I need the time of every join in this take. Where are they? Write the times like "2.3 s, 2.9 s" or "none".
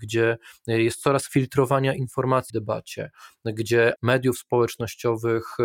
1.3 s, 2.5 s, 4.0 s

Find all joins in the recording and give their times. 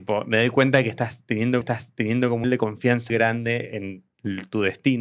1.6 s, 2.4 s, 3.1 s

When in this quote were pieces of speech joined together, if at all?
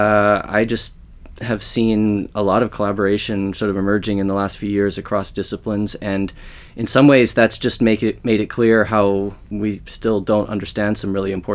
9.5 s

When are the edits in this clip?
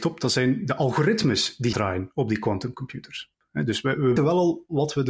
1.7 s, 3.3 s, 4.2 s

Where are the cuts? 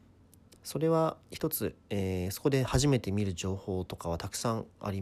1.8 s

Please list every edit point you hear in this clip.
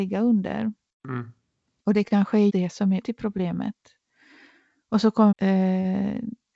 2.5 s, 3.0 s, 5.3 s

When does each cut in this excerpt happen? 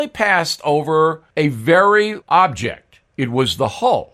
1.3 s, 2.2 s, 3.1 s

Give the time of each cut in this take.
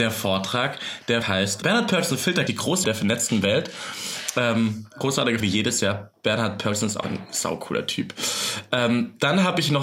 1.2 s, 1.6 s, 2.5 s, 2.8 s, 5.4 s, 7.0 s

